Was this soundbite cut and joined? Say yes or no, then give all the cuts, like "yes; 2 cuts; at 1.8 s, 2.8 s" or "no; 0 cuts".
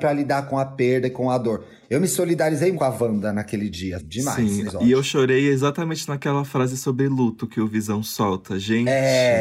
yes; 3 cuts; at 2.7 s, 4.0 s, 4.7 s